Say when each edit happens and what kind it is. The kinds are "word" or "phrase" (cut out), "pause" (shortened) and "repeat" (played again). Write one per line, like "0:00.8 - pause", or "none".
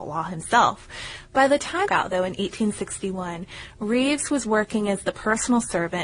0:01.9 - phrase